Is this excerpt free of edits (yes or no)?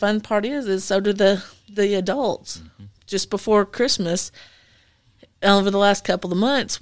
yes